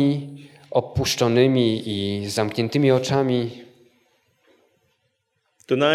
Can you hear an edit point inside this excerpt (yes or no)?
no